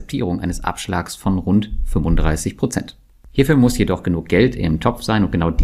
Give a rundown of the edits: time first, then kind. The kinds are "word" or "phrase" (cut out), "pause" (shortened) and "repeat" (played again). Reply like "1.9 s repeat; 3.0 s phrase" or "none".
none